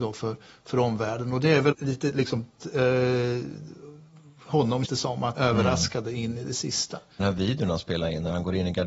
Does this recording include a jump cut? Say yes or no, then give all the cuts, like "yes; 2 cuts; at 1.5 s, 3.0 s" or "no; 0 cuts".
yes; 5 cuts; at 1.7 s, 2.6 s, 4.8 s, 5.3 s, 7.2 s